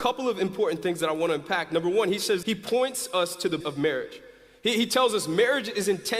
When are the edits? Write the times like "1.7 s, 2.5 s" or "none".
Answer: 2.4 s, 3.6 s